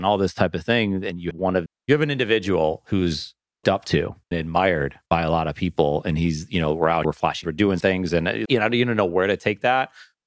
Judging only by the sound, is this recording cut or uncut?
cut